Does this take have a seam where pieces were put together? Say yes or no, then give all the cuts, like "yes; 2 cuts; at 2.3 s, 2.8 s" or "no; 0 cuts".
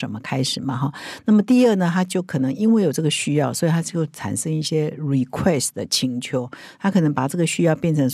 no; 0 cuts